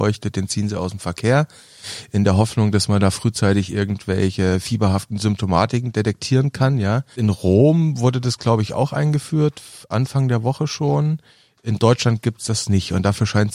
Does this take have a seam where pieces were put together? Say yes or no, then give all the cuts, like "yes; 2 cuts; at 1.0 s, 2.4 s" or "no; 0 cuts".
no; 0 cuts